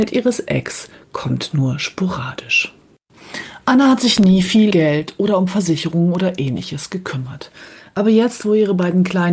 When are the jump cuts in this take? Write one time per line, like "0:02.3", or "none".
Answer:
0:04.7